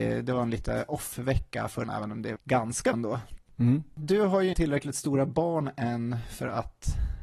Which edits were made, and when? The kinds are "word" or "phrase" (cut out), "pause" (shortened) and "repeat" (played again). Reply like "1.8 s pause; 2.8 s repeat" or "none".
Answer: 1.8 s word; 2.4 s word; 2.9 s word; 4.5 s word